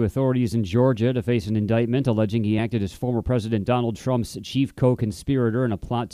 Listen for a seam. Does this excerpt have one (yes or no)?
no